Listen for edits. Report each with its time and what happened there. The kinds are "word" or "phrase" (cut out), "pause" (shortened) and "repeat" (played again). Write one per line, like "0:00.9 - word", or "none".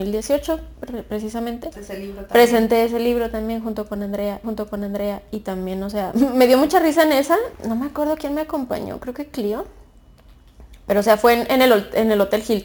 0:01.7 - word
0:04.4 - repeat
0:07.5 - pause